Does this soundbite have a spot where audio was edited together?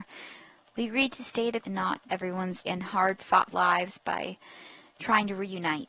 yes; 4 cuts; at 1.6 s, 2.1 s, 2.6 s, 3.5 s

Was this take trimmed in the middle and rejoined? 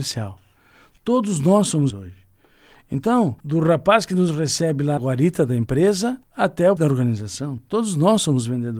yes; 5 cuts; at 1.9 s, 3.4 s, 5.0 s, 6.2 s, 6.8 s

